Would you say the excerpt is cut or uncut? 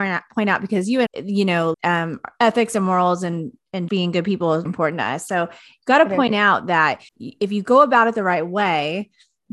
cut